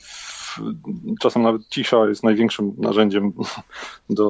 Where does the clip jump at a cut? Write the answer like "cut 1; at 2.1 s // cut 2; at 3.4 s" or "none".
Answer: none